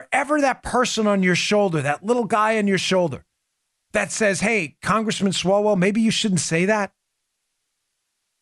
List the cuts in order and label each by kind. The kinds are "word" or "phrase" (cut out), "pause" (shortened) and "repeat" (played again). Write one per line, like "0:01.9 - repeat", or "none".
none